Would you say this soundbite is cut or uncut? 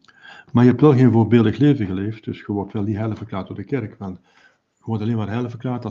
uncut